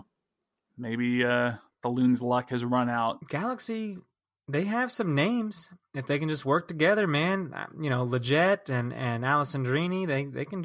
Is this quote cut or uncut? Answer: cut